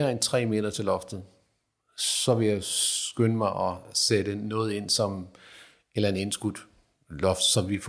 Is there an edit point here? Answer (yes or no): no